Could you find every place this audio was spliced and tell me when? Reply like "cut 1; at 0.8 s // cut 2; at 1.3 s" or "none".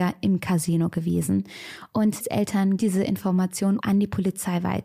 cut 1; at 2.2 s // cut 2; at 2.8 s // cut 3; at 3.8 s